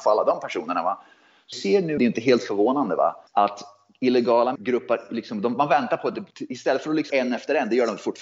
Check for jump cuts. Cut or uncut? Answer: cut